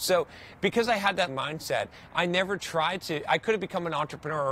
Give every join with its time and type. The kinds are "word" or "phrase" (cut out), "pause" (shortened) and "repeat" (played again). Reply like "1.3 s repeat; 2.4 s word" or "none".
1.3 s word

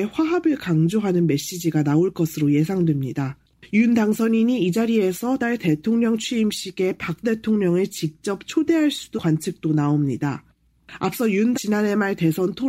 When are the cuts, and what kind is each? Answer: 5.4 s word; 7.2 s word; 9.2 s word; 11.5 s word

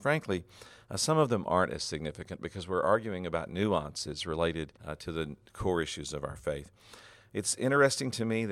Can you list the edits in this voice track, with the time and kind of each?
4.8 s pause

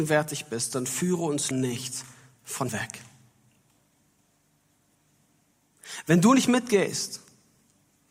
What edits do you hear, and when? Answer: 1.5 s word; 2.7 s word

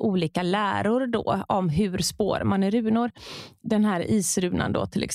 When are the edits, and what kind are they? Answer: none

